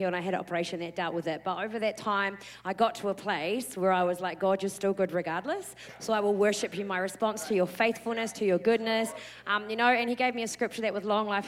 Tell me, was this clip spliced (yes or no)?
no